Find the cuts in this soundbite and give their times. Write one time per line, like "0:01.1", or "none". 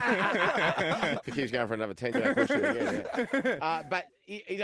0:02.1